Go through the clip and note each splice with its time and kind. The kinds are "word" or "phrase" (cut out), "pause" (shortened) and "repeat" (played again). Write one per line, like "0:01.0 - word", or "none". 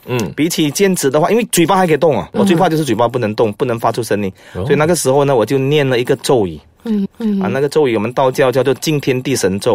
0:02.3 - word
0:07.1 - repeat

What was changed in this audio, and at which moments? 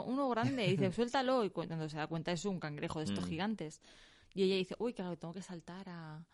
none

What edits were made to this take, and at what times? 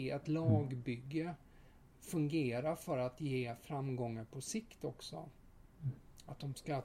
none

